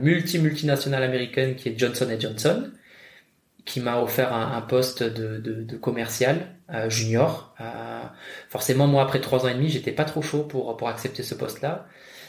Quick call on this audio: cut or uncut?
uncut